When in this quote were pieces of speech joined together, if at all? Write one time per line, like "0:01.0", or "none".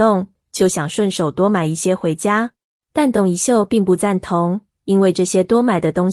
0:02.7